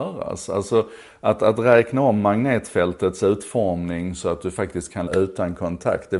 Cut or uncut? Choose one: cut